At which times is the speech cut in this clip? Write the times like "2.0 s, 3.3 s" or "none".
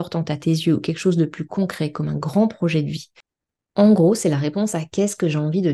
none